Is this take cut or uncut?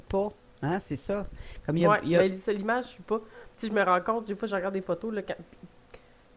uncut